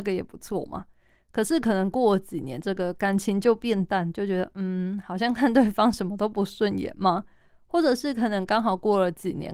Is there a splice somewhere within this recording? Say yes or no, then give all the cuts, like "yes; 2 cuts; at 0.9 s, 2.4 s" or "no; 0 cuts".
no; 0 cuts